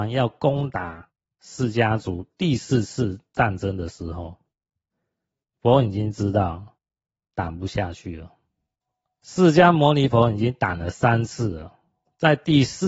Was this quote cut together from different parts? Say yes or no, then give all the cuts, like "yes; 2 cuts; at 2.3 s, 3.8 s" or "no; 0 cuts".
yes; 1 cut; at 8.8 s